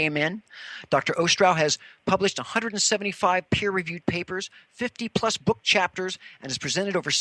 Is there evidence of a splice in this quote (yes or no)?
no